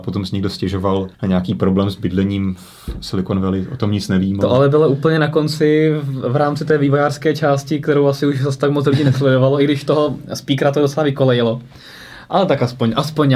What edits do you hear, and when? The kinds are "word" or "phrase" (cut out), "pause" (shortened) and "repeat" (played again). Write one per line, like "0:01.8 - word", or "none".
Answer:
0:01.1 - pause